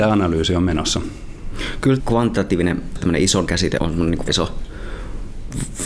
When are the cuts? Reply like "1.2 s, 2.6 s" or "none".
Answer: 2.0 s, 3.0 s, 3.5 s, 3.8 s, 4.3 s